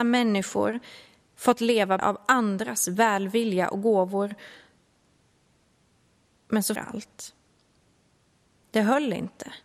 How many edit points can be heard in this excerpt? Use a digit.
2